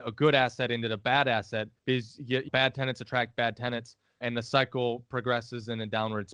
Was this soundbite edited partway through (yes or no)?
yes